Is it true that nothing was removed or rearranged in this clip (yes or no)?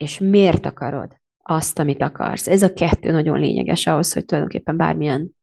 no